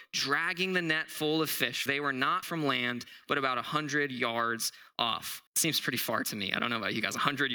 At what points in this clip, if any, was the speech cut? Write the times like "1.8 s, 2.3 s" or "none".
1.9 s, 2.4 s, 5.5 s